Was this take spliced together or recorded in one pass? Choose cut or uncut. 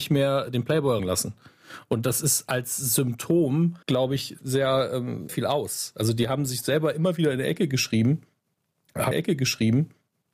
cut